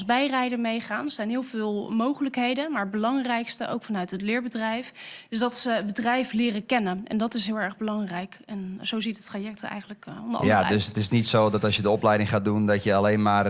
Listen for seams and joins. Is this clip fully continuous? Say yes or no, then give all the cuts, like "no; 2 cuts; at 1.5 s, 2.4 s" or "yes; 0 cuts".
yes; 0 cuts